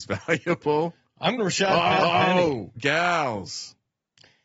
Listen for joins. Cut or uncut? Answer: cut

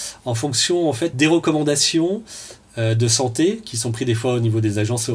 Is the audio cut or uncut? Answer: uncut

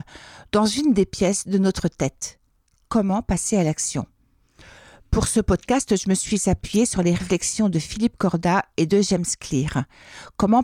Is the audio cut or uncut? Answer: uncut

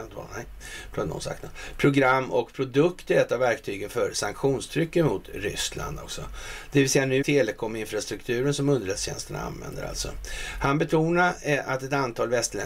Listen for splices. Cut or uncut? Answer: cut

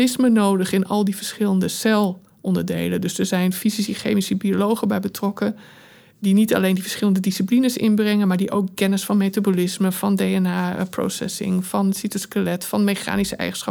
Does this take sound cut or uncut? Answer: uncut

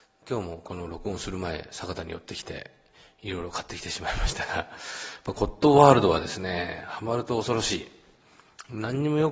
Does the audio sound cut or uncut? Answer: uncut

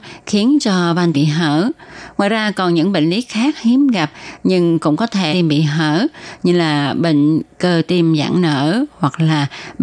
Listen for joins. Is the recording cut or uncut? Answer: cut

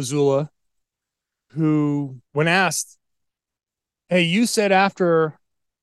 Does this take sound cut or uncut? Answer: cut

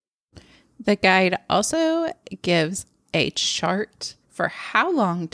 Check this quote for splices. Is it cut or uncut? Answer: cut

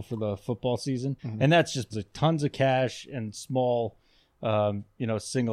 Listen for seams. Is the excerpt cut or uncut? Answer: cut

